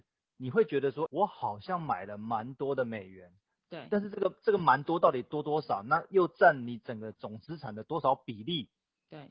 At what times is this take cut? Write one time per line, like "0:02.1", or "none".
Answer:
0:01.1